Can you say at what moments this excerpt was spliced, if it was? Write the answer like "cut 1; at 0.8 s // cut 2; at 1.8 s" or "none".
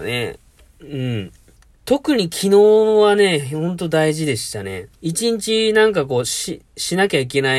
cut 1; at 1.6 s // cut 2; at 5.0 s

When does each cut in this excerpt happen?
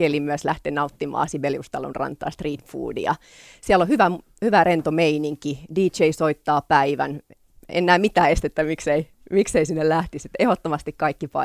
none

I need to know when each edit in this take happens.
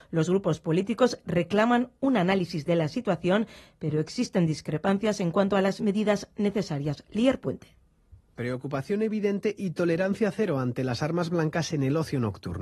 none

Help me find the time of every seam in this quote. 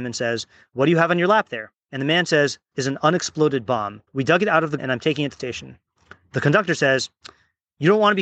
cut 1; at 1.8 s // cut 2; at 2.7 s // cut 3; at 4.1 s // cut 4; at 4.8 s // cut 5; at 5.4 s

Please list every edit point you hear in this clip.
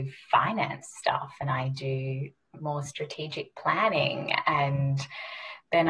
none

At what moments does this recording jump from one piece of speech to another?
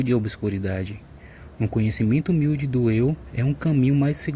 none

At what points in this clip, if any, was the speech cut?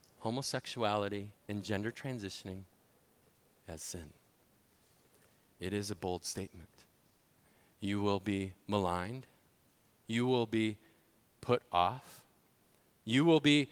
cut 1; at 1.4 s

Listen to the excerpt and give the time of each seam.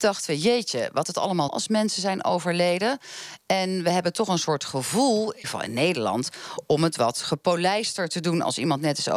cut 1; at 1.0 s // cut 2; at 1.5 s // cut 3; at 5.4 s

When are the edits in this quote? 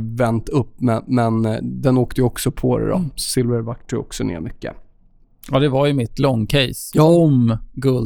none

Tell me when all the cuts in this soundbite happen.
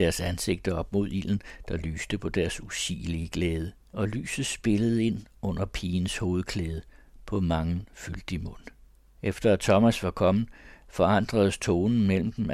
cut 1; at 3.8 s // cut 2; at 8.8 s

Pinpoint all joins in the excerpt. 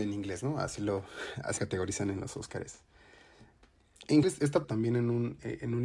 cut 1; at 1.6 s // cut 2; at 4.2 s // cut 3; at 4.6 s

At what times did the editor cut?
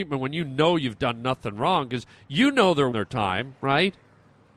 cut 1; at 2.9 s

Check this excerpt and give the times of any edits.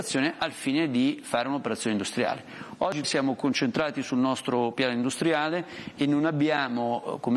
cut 1; at 3.0 s

